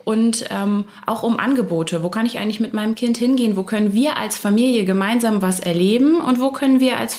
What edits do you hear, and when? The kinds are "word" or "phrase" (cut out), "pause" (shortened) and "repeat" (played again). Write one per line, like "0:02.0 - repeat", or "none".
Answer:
none